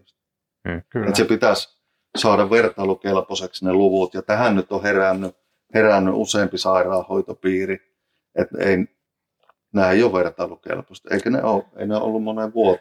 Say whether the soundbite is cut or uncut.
uncut